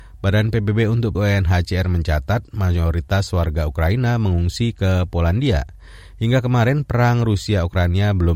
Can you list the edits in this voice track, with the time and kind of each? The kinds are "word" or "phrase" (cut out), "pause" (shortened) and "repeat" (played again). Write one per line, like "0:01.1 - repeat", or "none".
0:01.1 - word

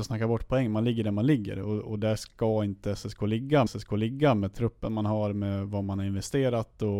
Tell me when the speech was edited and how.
0:03.7 - repeat

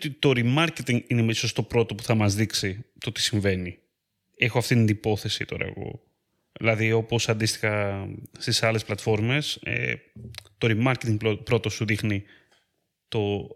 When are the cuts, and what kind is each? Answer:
none

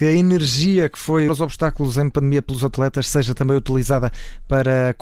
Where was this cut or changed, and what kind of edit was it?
0:01.3 - phrase
0:02.1 - word

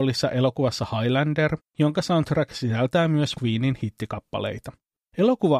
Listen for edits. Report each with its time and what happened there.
0:01.7 - pause
0:03.3 - word

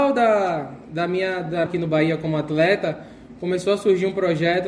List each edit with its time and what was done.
0:01.7 - phrase

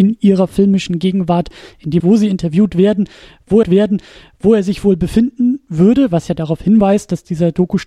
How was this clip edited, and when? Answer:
0:02.0 - word
0:03.6 - repeat

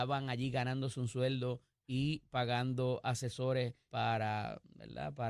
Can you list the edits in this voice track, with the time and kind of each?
0:03.9 - word

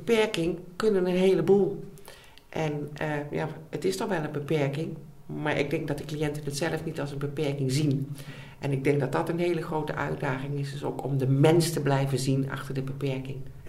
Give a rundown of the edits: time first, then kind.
none

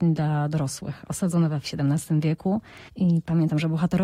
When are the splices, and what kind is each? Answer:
0:01.6 - word
0:02.9 - pause

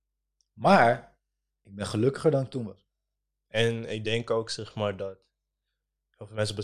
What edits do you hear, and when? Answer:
none

